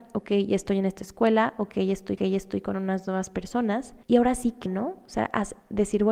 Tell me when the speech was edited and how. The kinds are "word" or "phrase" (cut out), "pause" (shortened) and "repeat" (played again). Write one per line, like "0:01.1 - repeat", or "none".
0:02.2 - repeat
0:04.0 - pause
0:04.7 - word